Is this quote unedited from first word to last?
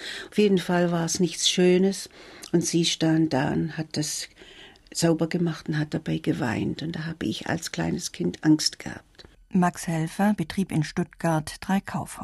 yes; 0 cuts

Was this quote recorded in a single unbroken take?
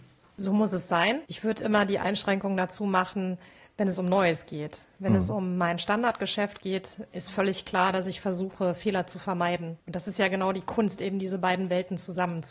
yes; 0 cuts

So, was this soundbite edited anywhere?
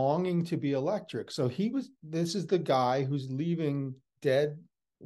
no; 0 cuts

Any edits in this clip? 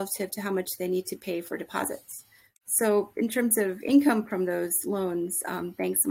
no; 0 cuts

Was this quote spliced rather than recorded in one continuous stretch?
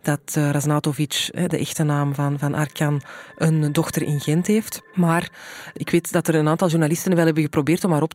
no; 0 cuts

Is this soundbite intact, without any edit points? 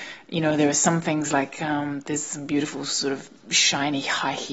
yes; 0 cuts

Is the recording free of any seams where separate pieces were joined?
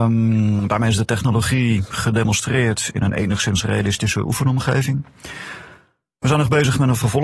yes; 0 cuts

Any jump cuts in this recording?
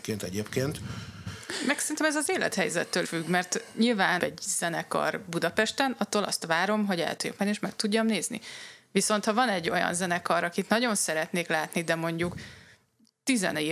yes; 2 cuts; at 3.0 s, 4.2 s

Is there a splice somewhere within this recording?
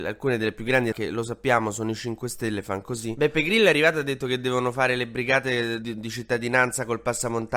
yes; 2 cuts; at 0.9 s, 5.8 s

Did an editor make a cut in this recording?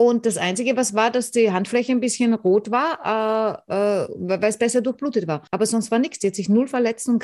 yes; 1 cut; at 5.5 s

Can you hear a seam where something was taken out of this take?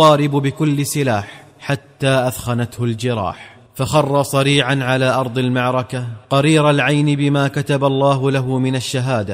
yes; 3 cuts; at 1.5 s, 3.7 s, 6.2 s

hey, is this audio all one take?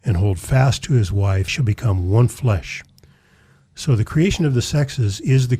no; 1 cut; at 1.5 s

